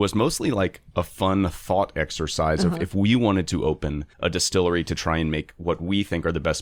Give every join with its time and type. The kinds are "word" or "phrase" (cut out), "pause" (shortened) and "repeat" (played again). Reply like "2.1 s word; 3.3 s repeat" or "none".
4.1 s pause